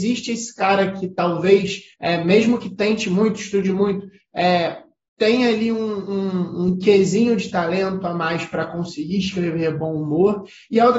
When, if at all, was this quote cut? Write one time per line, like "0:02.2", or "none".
0:01.9